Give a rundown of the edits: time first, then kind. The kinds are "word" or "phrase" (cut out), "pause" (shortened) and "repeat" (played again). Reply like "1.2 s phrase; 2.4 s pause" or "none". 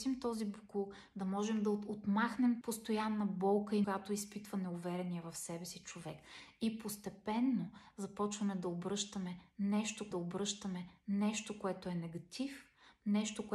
2.6 s word; 3.8 s word; 10.1 s repeat